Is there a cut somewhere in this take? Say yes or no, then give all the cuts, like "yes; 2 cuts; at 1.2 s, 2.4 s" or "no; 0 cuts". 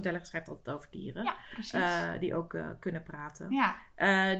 no; 0 cuts